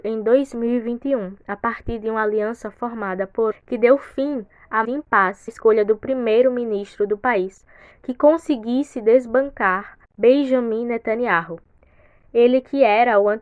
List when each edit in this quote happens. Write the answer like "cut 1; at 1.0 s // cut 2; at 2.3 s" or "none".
cut 1; at 3.5 s // cut 2; at 4.8 s // cut 3; at 5.5 s // cut 4; at 10.0 s

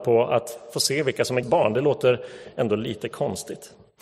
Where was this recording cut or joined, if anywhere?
cut 1; at 1.4 s

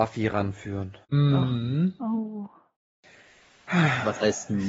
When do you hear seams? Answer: cut 1; at 1.0 s

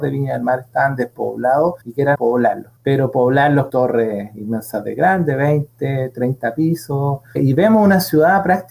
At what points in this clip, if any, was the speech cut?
cut 1; at 1.8 s // cut 2; at 2.1 s // cut 3; at 2.8 s // cut 4; at 3.7 s // cut 5; at 7.4 s

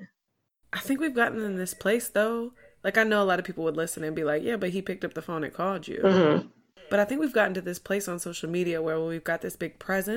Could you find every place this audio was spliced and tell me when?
none

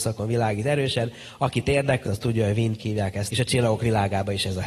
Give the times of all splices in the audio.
cut 1; at 2.1 s // cut 2; at 2.8 s // cut 3; at 3.3 s

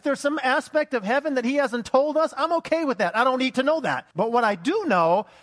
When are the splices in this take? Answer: cut 1; at 4.1 s

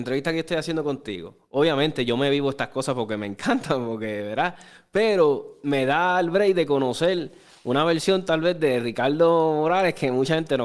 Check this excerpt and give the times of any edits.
none

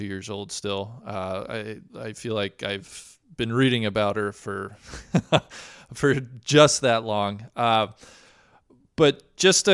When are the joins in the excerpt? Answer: none

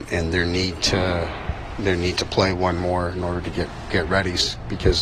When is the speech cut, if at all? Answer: cut 1; at 3.9 s

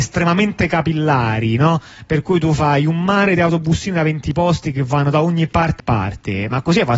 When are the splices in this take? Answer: cut 1; at 5.8 s

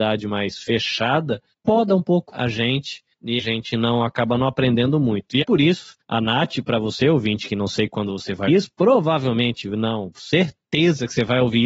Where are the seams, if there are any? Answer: cut 1; at 2.3 s // cut 2; at 3.4 s // cut 3; at 5.4 s // cut 4; at 6.0 s // cut 5; at 8.5 s

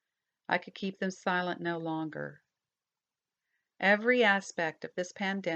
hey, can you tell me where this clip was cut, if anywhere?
none

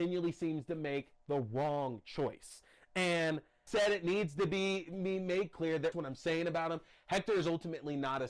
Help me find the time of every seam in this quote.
cut 1; at 3.7 s // cut 2; at 5.9 s

